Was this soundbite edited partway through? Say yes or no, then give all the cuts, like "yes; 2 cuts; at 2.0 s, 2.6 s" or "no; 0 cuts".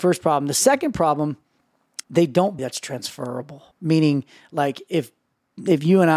yes; 3 cuts; at 2.0 s, 2.6 s, 3.7 s